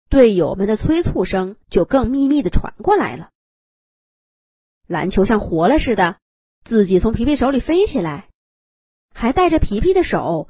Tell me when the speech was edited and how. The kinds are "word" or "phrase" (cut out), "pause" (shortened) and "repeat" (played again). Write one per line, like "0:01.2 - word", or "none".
0:01.6 - pause